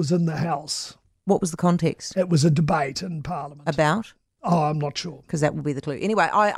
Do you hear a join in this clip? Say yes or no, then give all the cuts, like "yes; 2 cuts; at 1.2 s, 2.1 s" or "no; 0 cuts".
no; 0 cuts